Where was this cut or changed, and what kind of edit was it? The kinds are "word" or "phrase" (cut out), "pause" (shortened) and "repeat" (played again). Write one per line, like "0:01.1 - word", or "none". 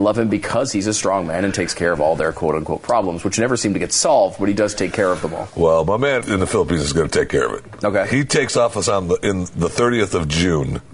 0:06.2 - word